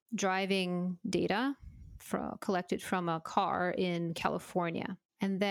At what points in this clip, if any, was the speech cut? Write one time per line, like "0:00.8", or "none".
none